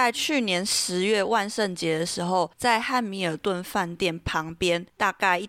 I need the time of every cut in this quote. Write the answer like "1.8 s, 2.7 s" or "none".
2.5 s